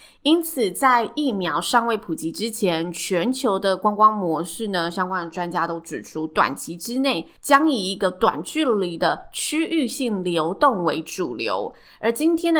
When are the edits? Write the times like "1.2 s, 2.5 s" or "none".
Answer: 7.4 s